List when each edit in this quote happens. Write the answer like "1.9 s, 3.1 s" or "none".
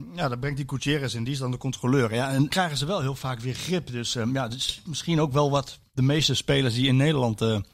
2.5 s